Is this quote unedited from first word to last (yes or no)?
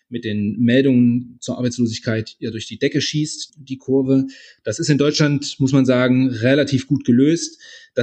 yes